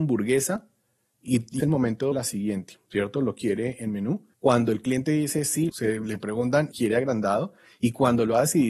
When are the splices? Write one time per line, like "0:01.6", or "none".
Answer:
0:01.6
0:02.1
0:04.3
0:05.7
0:06.7